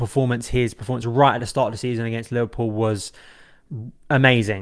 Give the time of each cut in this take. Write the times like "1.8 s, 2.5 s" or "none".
none